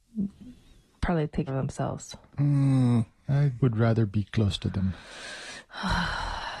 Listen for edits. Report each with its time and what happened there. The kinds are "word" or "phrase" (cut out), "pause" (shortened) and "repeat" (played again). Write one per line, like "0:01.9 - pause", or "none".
0:01.5 - word
0:03.6 - word